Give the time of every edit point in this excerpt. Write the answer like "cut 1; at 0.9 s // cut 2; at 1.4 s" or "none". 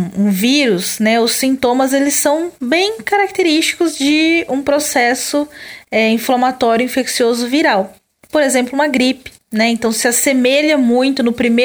none